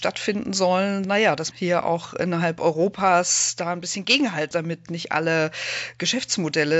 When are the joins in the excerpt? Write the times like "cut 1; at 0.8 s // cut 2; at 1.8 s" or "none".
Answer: cut 1; at 1.0 s // cut 2; at 1.5 s // cut 3; at 4.5 s // cut 4; at 4.9 s